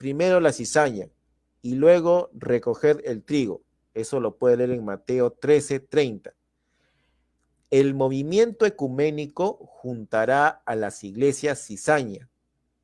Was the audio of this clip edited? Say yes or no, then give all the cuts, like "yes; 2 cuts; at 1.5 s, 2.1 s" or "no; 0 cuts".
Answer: no; 0 cuts